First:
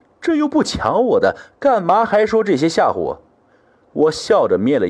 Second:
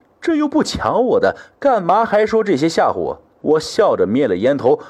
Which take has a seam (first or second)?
second